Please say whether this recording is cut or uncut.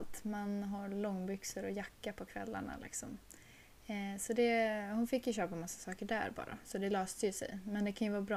uncut